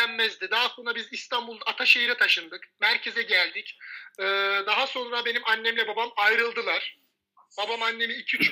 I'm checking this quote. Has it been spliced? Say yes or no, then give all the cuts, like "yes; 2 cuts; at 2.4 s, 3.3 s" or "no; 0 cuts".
no; 0 cuts